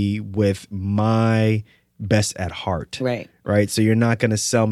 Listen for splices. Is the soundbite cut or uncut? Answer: cut